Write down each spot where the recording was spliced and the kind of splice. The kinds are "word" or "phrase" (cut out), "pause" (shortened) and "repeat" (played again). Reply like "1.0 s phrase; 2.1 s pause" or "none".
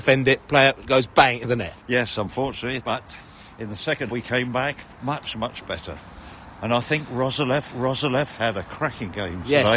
1.4 s phrase; 1.8 s pause; 2.8 s word; 4.1 s word; 4.9 s pause; 7.7 s repeat